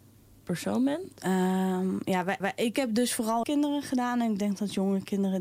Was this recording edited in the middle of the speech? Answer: yes; 2 cuts; at 2.4 s, 3.4 s

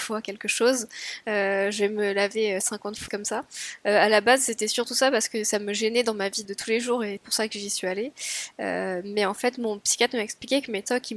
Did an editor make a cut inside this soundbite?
yes; 3 cuts; at 3.1 s, 6.4 s, 7.2 s

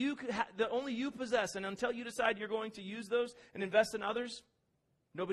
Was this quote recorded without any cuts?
yes; 0 cuts

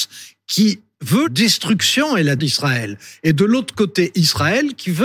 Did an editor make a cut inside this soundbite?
yes; 2 cuts; at 1.3 s, 2.4 s

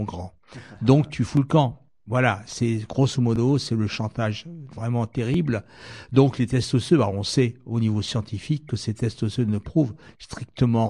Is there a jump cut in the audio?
no; 0 cuts

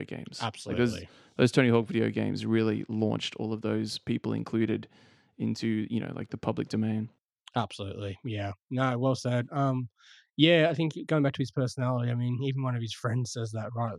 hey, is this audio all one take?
yes; 0 cuts

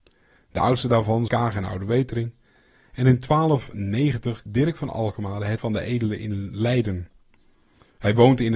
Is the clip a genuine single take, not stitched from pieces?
no; 3 cuts; at 1.3 s, 4.5 s, 5.6 s

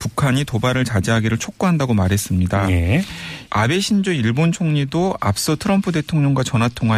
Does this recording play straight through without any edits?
no; 1 cut; at 3.5 s

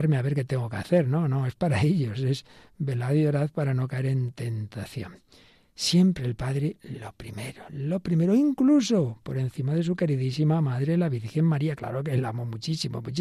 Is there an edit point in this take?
no; 0 cuts

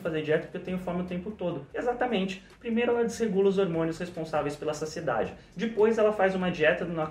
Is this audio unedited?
no; 1 cut; at 1.7 s

